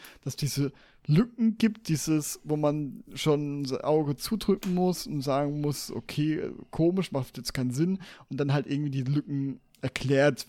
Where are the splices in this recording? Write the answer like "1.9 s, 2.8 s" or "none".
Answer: none